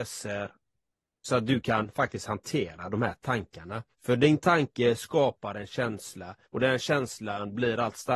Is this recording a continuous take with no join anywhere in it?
no; 2 cuts; at 3.9 s, 6.4 s

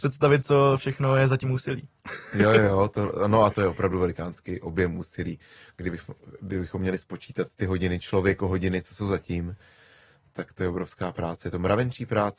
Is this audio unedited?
yes; 0 cuts

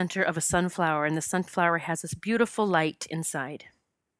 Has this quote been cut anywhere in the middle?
no; 0 cuts

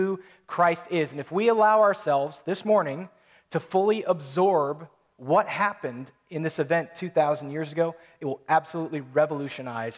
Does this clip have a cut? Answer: no; 0 cuts

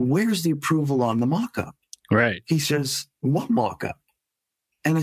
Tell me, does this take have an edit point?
no; 0 cuts

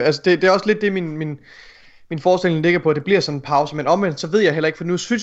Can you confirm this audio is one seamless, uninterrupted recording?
yes; 0 cuts

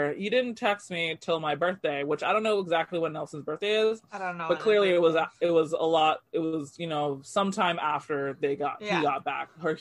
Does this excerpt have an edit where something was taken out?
no; 0 cuts

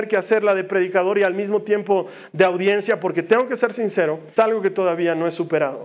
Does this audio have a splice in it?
yes; 1 cut; at 4.4 s

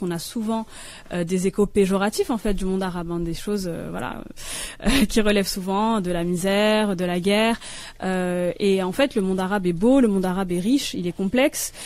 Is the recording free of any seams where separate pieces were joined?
yes; 0 cuts

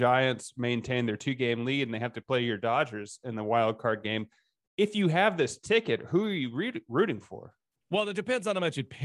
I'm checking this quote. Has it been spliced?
no; 0 cuts

